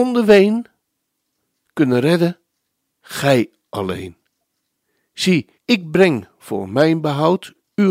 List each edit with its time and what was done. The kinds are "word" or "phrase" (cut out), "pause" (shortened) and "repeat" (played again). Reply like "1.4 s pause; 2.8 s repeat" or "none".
5.6 s pause